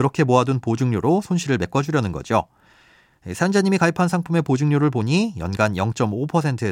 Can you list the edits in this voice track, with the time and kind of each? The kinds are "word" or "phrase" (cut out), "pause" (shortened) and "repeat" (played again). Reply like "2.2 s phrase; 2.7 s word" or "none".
none